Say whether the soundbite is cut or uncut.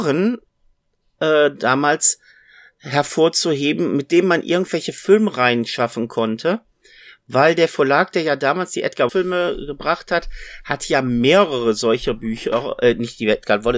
cut